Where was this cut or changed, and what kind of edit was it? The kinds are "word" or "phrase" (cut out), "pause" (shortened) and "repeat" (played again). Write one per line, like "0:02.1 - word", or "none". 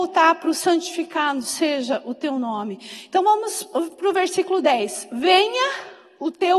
none